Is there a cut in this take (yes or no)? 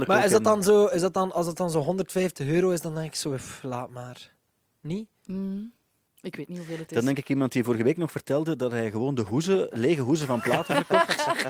no